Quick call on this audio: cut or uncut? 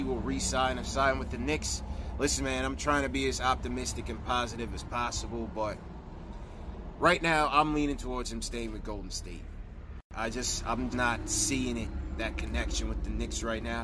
cut